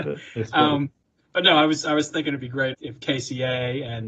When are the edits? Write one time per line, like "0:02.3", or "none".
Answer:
0:02.7